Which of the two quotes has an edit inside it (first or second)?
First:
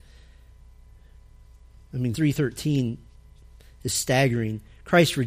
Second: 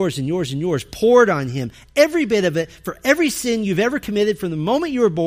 first